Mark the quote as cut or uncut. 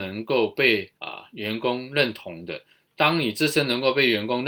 cut